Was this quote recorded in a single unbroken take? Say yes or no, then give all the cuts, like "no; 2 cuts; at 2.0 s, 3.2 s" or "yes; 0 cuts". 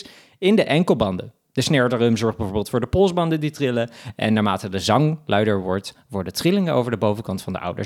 yes; 0 cuts